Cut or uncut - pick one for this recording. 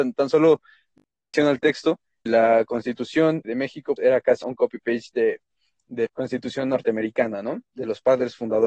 cut